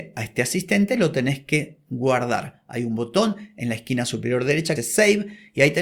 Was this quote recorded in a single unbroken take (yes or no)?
no